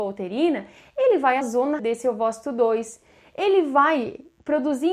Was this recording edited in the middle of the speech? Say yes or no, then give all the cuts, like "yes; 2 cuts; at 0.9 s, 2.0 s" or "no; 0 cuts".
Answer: yes; 2 cuts; at 1.4 s, 1.8 s